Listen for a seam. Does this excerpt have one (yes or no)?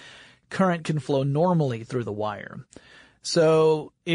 no